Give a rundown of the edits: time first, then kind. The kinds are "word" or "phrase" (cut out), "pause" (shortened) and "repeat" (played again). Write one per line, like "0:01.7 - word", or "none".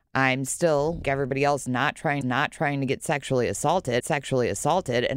0:01.0 - word
0:02.2 - repeat
0:04.0 - repeat